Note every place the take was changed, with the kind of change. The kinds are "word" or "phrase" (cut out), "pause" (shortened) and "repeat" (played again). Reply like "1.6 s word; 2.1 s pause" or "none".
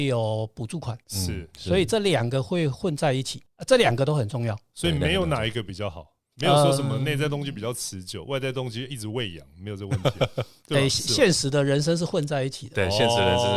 1.0 s pause; 3.5 s pause